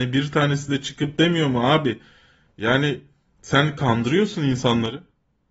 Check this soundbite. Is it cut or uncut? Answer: uncut